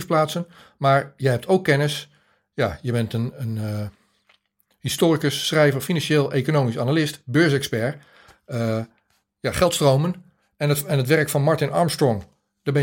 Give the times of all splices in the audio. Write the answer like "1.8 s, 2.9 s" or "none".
none